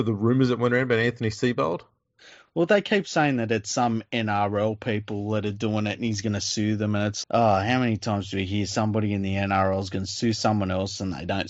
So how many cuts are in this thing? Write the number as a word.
one